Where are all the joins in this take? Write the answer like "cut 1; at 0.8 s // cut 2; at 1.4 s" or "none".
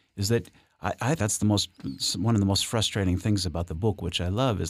cut 1; at 1.2 s

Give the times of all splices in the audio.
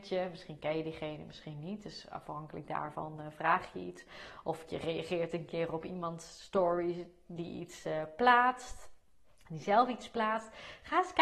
none

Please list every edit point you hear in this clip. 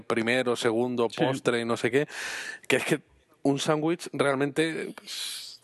none

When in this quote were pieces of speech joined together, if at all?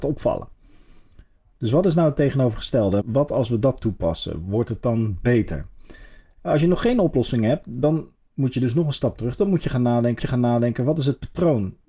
cut 1; at 3.0 s // cut 2; at 10.2 s

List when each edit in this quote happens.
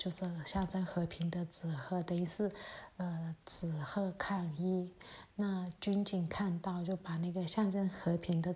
none

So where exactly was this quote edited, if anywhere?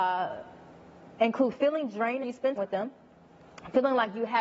cut 1; at 2.2 s // cut 2; at 2.6 s

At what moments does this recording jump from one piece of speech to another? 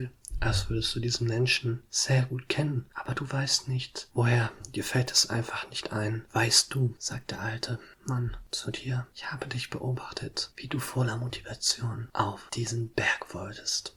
none

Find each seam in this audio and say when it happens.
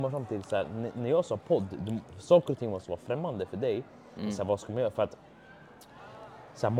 none

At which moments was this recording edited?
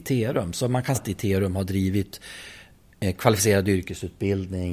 cut 1; at 0.9 s

